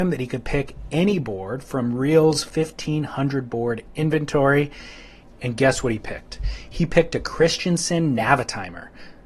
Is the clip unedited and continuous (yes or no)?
yes